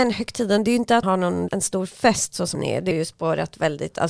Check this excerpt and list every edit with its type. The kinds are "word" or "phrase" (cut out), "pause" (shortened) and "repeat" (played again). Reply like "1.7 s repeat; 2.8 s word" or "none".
1.0 s word; 1.5 s word; 2.5 s word; 2.9 s word